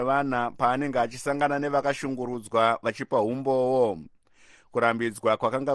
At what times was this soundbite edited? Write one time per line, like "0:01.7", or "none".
none